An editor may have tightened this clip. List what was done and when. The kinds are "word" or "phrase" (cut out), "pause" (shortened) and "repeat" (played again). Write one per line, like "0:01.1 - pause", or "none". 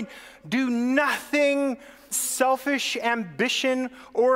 0:02.1 - word